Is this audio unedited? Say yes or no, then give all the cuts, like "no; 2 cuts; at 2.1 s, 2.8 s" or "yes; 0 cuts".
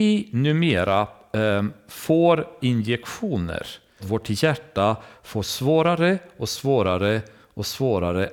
no; 2 cuts; at 2.6 s, 4.0 s